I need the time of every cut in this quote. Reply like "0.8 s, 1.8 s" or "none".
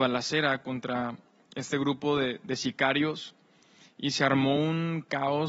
none